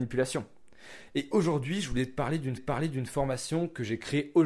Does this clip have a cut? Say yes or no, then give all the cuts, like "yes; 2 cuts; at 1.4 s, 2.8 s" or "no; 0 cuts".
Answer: yes; 1 cut; at 2.6 s